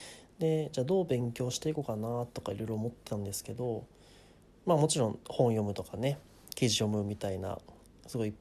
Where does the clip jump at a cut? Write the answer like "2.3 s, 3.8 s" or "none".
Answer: none